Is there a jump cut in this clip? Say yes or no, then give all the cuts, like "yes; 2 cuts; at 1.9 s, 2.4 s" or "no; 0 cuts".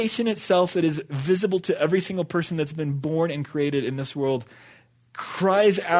no; 0 cuts